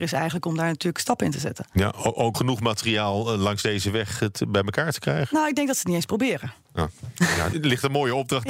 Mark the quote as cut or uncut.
cut